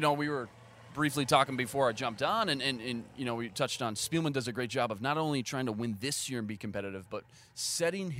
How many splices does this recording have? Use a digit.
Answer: 0